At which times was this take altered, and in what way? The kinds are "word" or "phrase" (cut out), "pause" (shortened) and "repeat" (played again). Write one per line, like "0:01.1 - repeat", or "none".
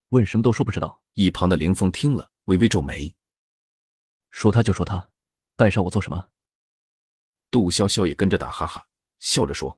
0:01.1 - pause